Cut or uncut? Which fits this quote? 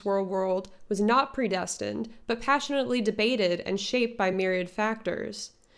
uncut